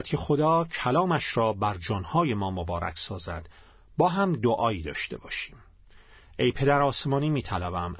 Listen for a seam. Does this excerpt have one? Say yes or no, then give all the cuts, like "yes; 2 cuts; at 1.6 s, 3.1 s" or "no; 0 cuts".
no; 0 cuts